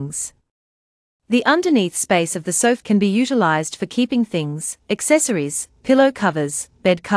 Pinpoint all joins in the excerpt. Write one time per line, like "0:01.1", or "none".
0:02.8
0:04.8